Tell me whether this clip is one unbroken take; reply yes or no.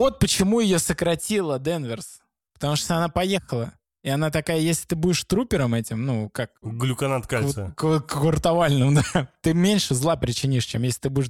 yes